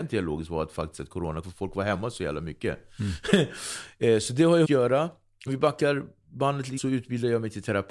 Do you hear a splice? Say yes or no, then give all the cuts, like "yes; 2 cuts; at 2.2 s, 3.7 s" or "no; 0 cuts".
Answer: yes; 4 cuts; at 1.4 s, 4.6 s, 5.5 s, 6.8 s